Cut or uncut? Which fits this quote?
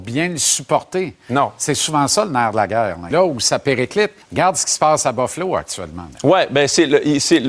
cut